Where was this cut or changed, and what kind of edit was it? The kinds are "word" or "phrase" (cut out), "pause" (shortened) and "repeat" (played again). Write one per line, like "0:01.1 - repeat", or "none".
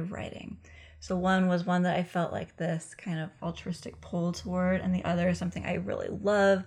none